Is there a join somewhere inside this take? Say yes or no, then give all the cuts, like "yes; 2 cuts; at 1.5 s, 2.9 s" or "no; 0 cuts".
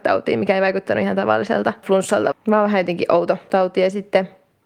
yes; 1 cut; at 2.3 s